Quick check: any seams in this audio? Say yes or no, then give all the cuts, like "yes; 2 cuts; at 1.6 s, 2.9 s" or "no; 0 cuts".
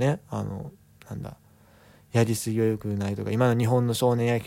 no; 0 cuts